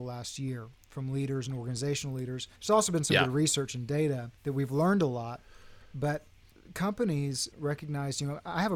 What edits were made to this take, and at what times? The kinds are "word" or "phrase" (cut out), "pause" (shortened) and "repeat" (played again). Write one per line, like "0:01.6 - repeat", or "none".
0:02.6 - pause
0:04.4 - pause
0:07.5 - word